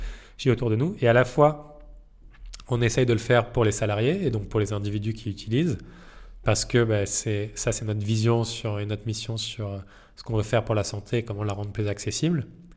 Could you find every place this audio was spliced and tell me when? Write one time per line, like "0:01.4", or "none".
none